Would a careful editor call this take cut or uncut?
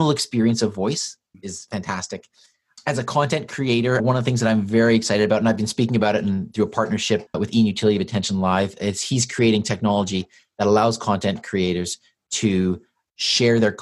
cut